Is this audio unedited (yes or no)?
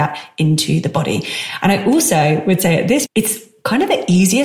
no